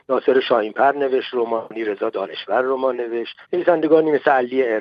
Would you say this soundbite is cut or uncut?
cut